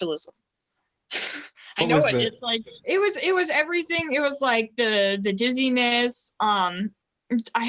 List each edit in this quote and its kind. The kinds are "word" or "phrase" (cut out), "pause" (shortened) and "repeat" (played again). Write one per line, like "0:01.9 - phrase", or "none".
0:02.8 - pause

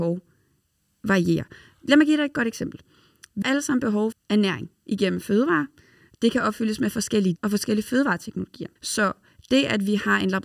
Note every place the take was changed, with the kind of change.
0:03.4 - word
0:04.1 - word
0:07.4 - word
0:08.8 - pause

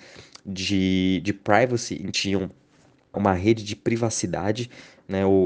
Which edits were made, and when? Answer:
0:02.1 - word
0:03.1 - word

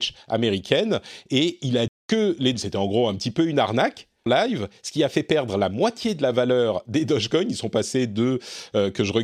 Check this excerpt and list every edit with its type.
0:01.9 - word
0:02.5 - word
0:04.3 - word

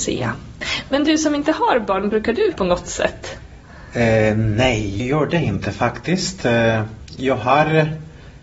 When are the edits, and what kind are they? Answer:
0:02.5 - word
0:05.0 - word

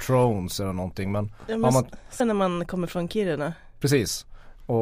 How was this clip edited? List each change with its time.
0:02.2 - word

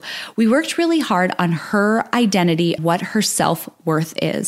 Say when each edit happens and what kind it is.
0:02.8 - word

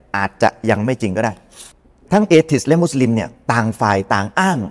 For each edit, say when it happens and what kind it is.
none

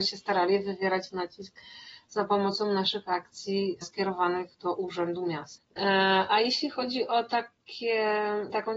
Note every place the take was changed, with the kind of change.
0:04.5 - pause

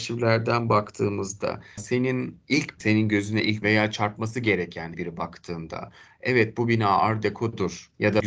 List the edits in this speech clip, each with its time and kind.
0:01.8 - word
0:02.8 - word
0:03.6 - word
0:04.9 - word

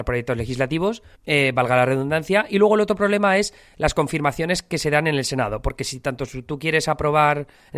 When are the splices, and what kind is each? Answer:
0:01.1 - pause

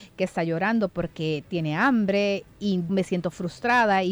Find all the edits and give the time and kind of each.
0:02.9 - word

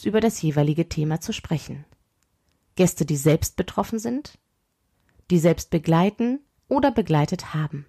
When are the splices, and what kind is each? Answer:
none

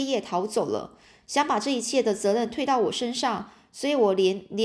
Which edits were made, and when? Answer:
none

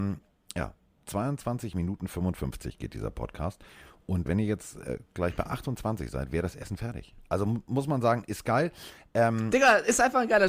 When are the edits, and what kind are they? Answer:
0:04.3 - word

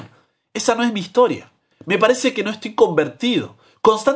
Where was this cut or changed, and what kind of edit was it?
0:01.6 - pause

